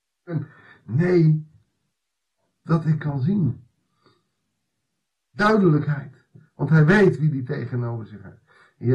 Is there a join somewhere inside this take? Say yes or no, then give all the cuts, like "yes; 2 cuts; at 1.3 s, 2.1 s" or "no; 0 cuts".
yes; 2 cuts; at 2.7 s, 3.0 s